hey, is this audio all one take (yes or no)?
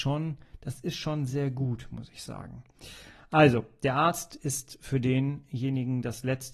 no